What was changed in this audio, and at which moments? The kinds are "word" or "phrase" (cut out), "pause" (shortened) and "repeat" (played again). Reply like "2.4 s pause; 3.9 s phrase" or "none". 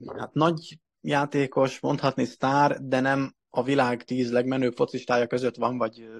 none